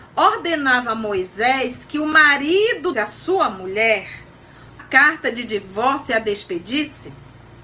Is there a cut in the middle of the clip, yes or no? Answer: yes